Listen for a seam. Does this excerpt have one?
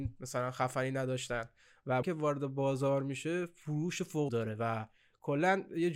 yes; 2 cuts; at 2.0 s, 4.3 s

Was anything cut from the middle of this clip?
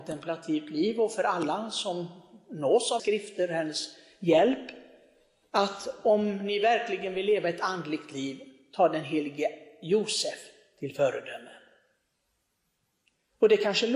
yes; 1 cut; at 3.0 s

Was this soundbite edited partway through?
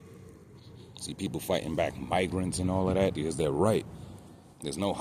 no; 0 cuts

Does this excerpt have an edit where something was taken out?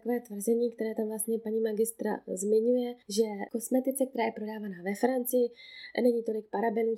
no; 0 cuts

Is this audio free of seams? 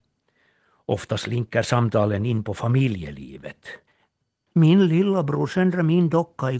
yes; 0 cuts

